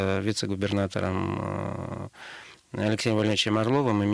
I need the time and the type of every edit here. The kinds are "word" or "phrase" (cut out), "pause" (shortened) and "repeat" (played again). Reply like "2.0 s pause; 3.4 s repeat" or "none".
none